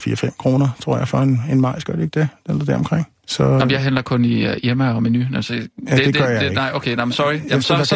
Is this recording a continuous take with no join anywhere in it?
yes; 0 cuts

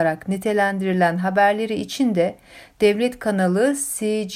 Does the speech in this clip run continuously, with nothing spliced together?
yes; 0 cuts

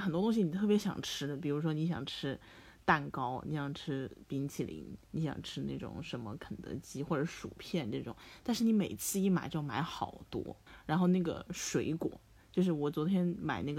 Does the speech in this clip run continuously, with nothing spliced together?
no; 2 cuts; at 5.0 s, 10.7 s

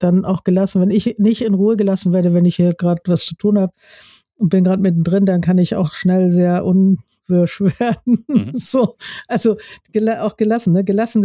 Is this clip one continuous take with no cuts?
yes; 0 cuts

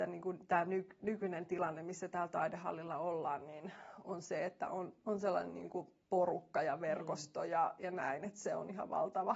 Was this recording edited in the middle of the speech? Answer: no; 0 cuts

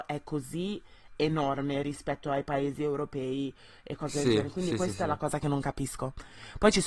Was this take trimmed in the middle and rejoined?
no; 0 cuts

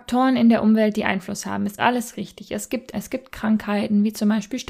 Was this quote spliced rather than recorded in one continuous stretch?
yes; 2 cuts; at 1.8 s, 2.9 s

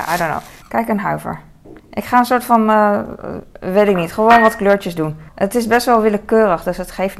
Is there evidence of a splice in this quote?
yes; 2 cuts; at 1.8 s, 5.3 s

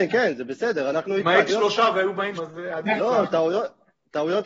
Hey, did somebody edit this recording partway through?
yes; 2 cuts; at 1.5 s, 2.4 s

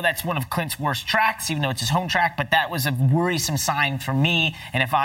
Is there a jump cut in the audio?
no; 0 cuts

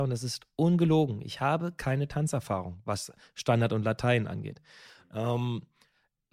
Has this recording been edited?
no; 0 cuts

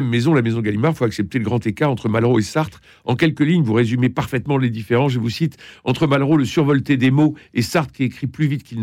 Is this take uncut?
yes; 0 cuts

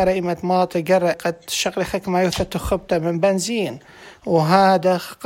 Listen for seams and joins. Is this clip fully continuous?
no; 1 cut; at 1.1 s

